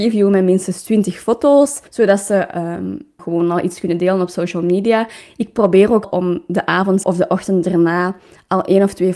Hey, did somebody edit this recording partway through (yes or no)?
yes